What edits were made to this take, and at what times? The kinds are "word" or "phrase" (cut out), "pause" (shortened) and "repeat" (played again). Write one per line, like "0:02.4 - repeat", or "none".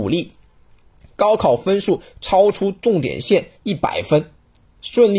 0:03.6 - pause